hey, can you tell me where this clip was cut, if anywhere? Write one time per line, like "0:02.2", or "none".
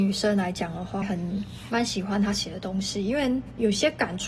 0:01.0